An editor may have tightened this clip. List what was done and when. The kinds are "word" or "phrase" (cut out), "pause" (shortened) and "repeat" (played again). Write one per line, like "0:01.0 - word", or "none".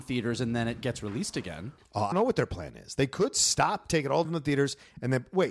0:02.1 - word
0:04.2 - word